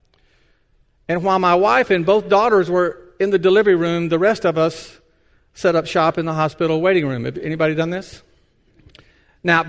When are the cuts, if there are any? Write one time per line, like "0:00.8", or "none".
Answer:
none